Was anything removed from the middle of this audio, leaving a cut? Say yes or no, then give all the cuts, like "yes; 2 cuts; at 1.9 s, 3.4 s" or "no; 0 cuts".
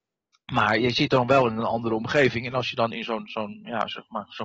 no; 0 cuts